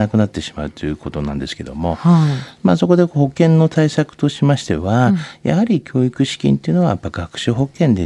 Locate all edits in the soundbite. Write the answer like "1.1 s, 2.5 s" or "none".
none